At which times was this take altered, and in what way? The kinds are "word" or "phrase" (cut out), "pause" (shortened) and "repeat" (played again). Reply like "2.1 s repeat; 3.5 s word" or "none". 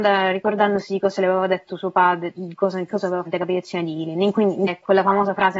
3.2 s phrase; 4.7 s word